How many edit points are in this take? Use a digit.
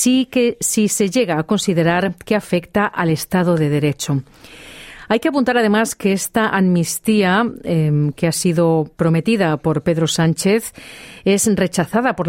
0